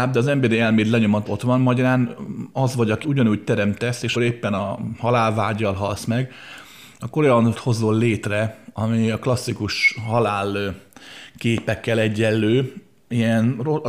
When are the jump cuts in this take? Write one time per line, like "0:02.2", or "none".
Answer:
0:01.3
0:03.0
0:04.2
0:07.5